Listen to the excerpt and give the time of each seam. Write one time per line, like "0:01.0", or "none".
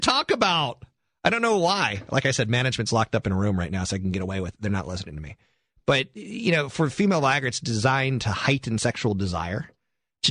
none

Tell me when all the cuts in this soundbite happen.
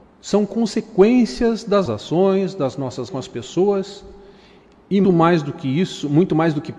0:01.9
0:03.1
0:05.0

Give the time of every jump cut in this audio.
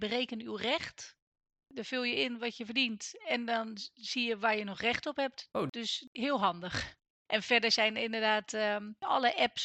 none

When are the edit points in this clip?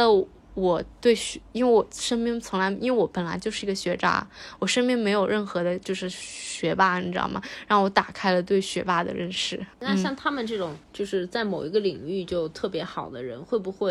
0:09.7
0:10.8

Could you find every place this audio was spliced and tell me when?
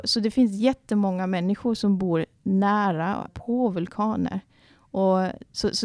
0:03.3

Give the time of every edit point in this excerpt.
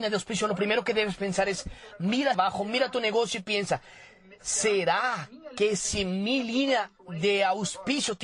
0:02.3

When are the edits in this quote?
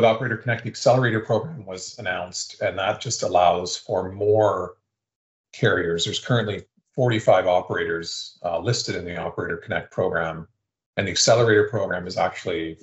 none

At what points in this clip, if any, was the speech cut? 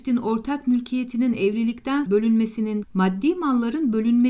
0:02.1
0:02.8

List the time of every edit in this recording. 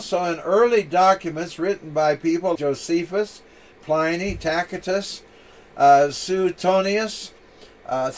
0:02.5

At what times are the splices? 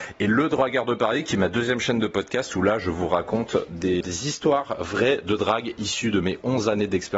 0:04.0

